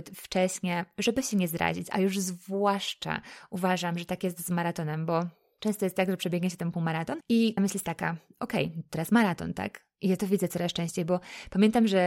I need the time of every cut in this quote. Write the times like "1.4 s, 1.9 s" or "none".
7.6 s